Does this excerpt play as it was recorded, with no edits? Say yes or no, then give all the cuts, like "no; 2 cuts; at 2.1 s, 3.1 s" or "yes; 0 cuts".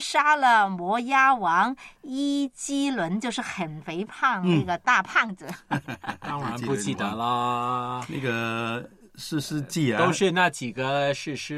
yes; 0 cuts